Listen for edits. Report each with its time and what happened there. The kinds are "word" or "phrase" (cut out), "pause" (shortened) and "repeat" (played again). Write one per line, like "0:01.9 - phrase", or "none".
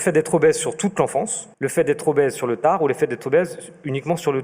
0:01.5 - pause